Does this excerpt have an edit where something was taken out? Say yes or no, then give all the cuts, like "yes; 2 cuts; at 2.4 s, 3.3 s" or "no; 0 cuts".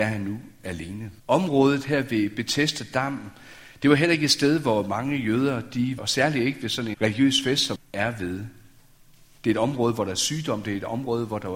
yes; 4 cuts; at 1.2 s, 6.0 s, 6.9 s, 7.8 s